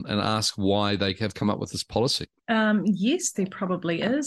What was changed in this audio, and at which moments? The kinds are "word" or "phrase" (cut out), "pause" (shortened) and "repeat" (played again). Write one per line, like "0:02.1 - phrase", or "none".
none